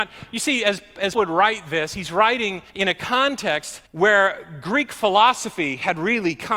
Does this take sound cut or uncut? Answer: cut